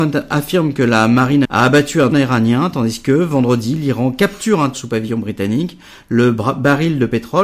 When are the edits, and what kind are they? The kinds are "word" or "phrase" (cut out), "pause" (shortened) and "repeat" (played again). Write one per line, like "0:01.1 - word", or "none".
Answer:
0:01.4 - word
0:02.1 - word
0:04.7 - word